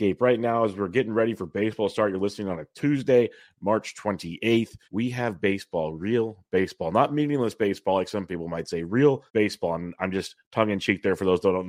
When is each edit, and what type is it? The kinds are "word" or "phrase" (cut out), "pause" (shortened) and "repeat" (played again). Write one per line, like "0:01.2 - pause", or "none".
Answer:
0:04.8 - pause
0:09.3 - pause